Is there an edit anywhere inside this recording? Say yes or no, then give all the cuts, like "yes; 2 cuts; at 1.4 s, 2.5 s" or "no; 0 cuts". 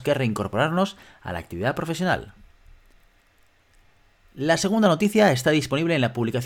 no; 0 cuts